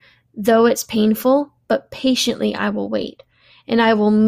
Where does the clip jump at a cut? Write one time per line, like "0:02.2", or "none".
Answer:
none